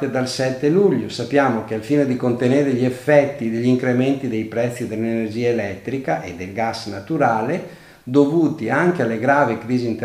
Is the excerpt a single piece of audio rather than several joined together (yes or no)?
yes